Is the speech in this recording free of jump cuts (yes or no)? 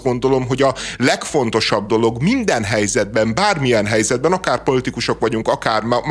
yes